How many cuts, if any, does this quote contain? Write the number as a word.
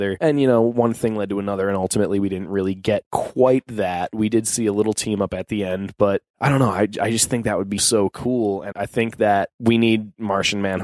three